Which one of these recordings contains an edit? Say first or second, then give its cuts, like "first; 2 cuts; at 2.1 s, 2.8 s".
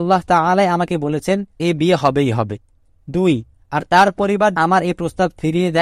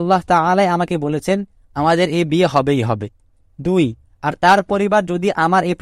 first; 2 cuts; at 1.6 s, 4.6 s